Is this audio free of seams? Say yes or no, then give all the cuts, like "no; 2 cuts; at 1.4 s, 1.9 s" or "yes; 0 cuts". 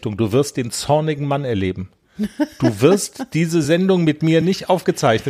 yes; 0 cuts